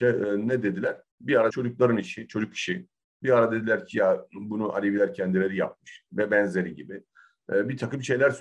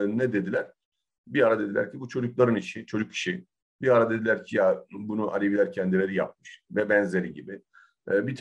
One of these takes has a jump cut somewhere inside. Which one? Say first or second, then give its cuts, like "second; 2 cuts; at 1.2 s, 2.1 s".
first; 2 cuts; at 1.1 s, 1.5 s